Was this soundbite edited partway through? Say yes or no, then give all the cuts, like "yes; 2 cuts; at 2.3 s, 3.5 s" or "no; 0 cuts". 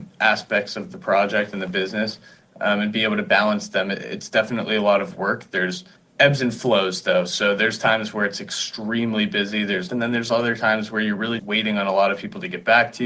yes; 3 cuts; at 6.0 s, 9.9 s, 11.4 s